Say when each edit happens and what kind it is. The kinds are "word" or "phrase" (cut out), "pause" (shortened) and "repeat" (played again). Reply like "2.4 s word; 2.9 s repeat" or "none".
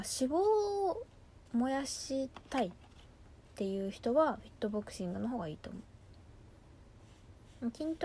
1.5 s pause